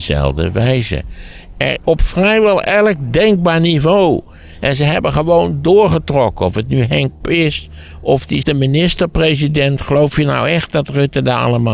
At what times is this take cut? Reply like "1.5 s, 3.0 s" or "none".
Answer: 1.8 s, 7.2 s, 8.4 s